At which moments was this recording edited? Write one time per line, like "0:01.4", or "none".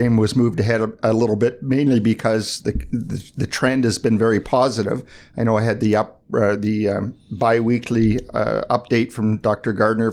none